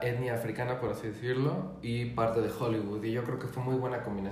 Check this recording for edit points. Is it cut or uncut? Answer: uncut